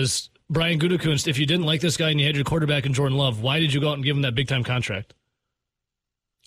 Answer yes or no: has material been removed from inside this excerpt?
no